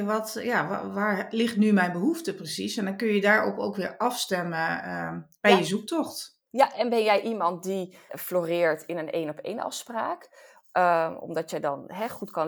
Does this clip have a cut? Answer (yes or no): yes